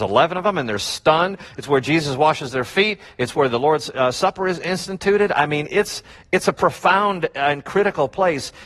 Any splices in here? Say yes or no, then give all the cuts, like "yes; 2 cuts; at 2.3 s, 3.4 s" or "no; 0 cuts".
no; 0 cuts